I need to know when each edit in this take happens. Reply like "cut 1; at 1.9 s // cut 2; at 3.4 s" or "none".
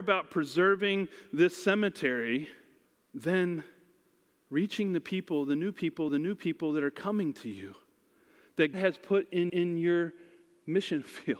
cut 1; at 2.8 s // cut 2; at 6.1 s // cut 3; at 8.7 s // cut 4; at 9.5 s